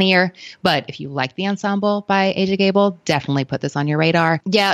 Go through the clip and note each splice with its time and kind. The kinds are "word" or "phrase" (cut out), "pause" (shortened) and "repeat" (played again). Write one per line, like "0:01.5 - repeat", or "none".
none